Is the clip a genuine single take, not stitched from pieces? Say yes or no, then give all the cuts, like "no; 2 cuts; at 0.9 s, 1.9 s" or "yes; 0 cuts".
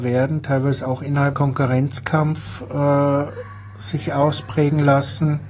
no; 1 cut; at 1.3 s